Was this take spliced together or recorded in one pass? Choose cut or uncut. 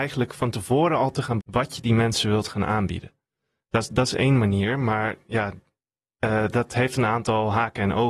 cut